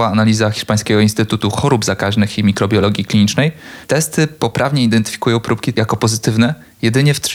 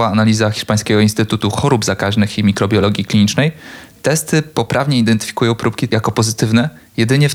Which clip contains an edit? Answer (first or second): first